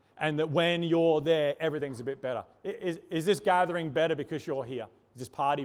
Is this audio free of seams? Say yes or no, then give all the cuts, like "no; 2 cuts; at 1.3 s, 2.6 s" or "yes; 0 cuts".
yes; 0 cuts